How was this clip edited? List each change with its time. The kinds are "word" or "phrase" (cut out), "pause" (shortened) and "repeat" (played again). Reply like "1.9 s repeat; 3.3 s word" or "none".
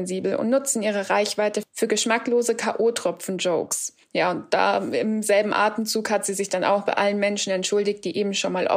4.0 s pause